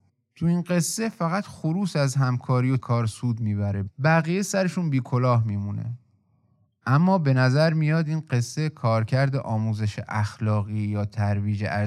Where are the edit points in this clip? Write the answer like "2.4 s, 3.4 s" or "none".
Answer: 2.8 s